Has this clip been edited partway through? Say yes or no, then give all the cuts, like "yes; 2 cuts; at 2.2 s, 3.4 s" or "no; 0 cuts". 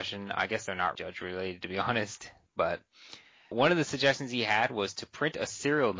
yes; 2 cuts; at 0.9 s, 3.5 s